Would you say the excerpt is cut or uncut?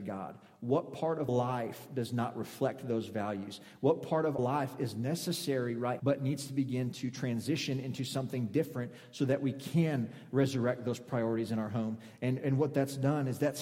cut